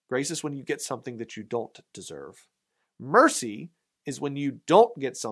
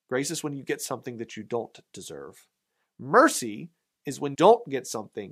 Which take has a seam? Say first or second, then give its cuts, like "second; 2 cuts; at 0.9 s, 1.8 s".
second; 1 cut; at 4.3 s